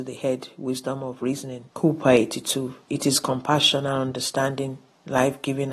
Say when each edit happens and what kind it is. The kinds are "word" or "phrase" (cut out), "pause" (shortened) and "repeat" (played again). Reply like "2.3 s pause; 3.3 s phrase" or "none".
1.7 s pause; 2.8 s pause